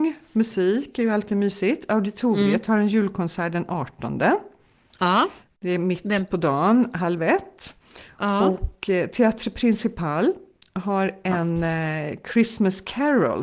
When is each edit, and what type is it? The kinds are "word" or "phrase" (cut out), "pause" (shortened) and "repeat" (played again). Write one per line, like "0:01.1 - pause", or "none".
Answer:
none